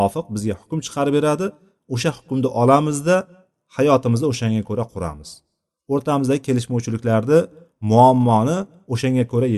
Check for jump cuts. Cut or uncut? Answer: uncut